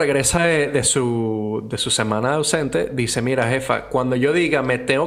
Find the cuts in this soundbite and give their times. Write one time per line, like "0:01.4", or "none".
none